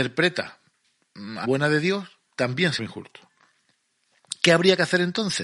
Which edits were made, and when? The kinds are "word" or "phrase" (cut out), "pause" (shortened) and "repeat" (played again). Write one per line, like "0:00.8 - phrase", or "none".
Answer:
0:01.4 - word
0:02.8 - word